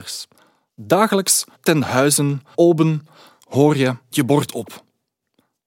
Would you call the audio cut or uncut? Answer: cut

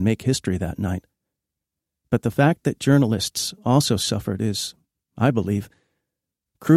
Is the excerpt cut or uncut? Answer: uncut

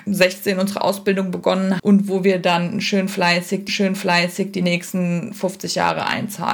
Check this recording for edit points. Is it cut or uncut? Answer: cut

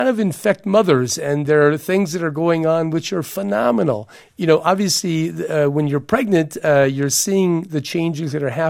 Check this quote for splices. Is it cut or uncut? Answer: uncut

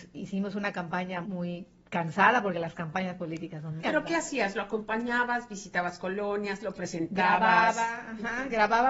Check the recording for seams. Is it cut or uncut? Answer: cut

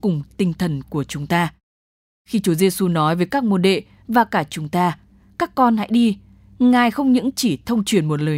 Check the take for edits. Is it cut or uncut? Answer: uncut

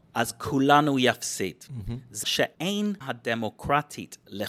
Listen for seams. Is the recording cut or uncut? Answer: cut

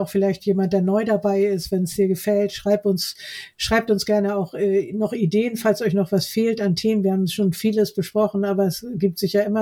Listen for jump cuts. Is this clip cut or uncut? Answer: uncut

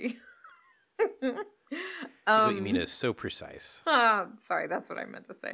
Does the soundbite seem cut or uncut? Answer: uncut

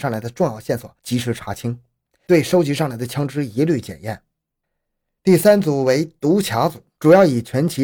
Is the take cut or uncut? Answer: uncut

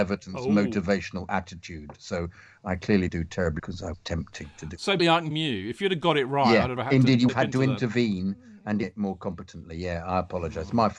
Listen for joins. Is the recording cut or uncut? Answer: cut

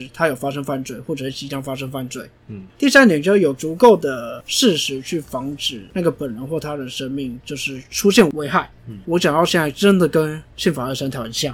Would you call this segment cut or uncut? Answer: cut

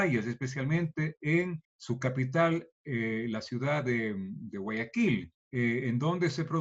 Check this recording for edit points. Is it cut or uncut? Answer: cut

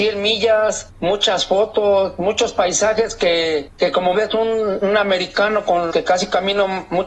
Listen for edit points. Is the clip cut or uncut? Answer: cut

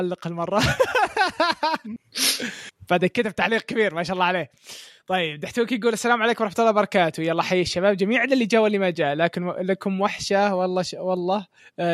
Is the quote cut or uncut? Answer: uncut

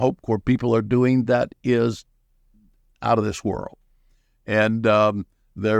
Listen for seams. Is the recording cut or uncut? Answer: uncut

